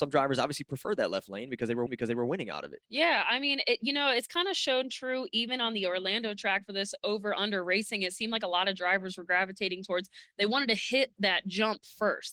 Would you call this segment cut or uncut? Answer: cut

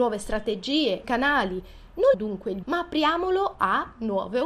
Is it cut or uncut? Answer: cut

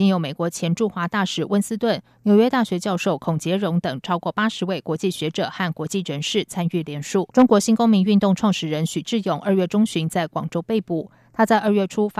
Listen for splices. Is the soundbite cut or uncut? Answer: cut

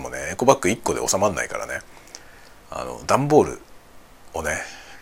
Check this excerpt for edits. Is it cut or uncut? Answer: cut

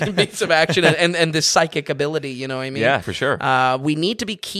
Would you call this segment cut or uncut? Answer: cut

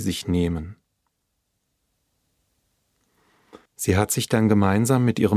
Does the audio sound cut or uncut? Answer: cut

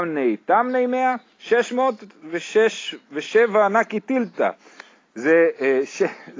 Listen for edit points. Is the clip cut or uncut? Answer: uncut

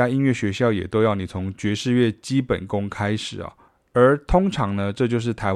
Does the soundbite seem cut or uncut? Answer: cut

